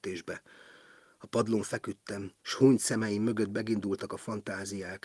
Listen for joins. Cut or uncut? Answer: cut